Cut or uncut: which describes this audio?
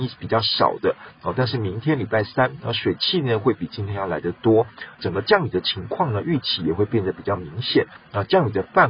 cut